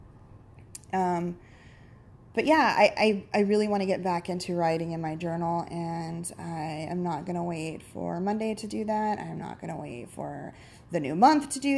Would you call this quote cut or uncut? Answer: uncut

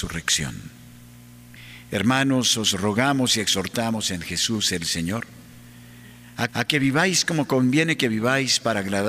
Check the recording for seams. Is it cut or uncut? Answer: cut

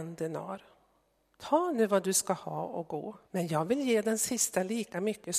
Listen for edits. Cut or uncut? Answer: cut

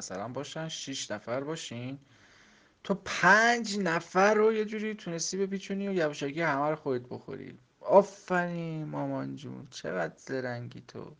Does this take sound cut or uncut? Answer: uncut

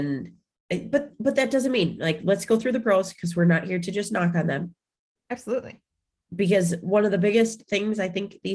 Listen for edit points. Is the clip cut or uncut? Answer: uncut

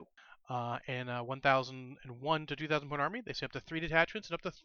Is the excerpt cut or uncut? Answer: uncut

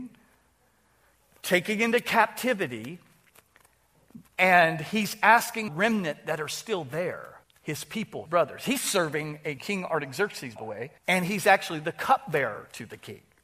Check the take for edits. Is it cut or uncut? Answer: cut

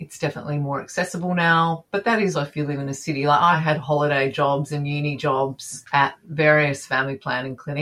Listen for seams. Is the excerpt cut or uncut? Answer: cut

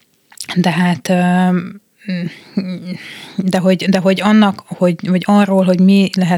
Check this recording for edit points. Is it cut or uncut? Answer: uncut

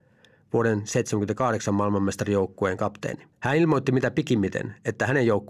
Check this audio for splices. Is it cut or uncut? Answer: cut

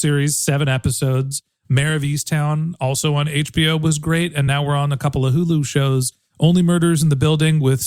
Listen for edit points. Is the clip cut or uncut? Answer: uncut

